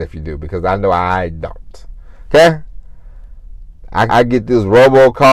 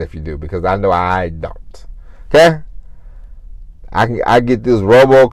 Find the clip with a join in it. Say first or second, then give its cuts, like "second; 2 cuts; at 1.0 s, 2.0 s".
first; 1 cut; at 4.1 s